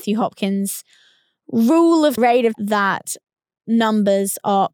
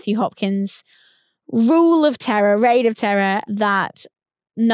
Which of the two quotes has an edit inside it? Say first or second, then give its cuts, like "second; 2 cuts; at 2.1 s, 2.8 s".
first; 2 cuts; at 2.2 s, 2.5 s